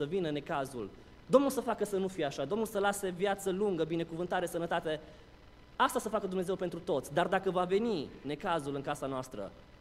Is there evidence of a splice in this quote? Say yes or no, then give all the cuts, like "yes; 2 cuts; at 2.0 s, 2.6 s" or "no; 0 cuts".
no; 0 cuts